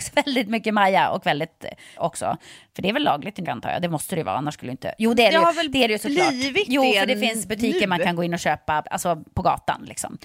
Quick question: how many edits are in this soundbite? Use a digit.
3